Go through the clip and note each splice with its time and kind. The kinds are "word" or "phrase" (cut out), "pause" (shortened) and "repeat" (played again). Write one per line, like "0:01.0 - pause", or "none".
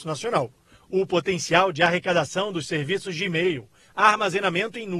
none